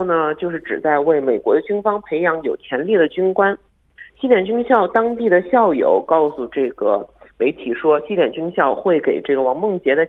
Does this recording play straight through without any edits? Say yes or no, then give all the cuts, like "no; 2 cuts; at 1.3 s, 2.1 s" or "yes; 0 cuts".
yes; 0 cuts